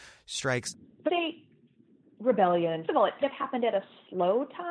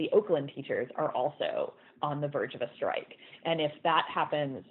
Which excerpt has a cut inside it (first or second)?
first